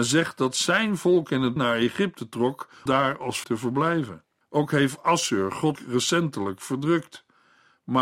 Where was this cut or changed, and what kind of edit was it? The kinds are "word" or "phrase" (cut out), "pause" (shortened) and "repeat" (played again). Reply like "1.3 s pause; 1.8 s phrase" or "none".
1.6 s word; 2.9 s word; 3.4 s word; 4.4 s pause; 5.8 s word